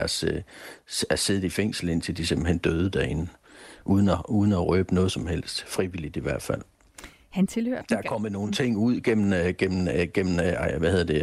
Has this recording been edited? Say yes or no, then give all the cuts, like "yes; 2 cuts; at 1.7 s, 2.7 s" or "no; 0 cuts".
no; 0 cuts